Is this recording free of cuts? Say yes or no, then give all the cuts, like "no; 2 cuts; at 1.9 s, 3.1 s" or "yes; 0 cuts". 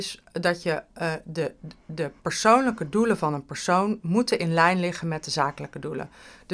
no; 1 cut; at 2.2 s